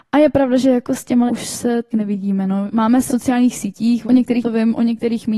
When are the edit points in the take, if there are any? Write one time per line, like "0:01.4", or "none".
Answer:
0:01.3
0:01.9
0:02.7
0:03.1
0:04.0
0:04.4